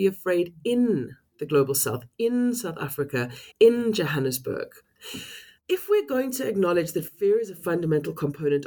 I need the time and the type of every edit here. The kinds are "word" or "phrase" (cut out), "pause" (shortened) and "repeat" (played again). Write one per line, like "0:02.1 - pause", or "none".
0:01.3 - pause
0:03.5 - pause
0:05.6 - pause